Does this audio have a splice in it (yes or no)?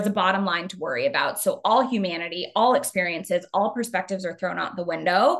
no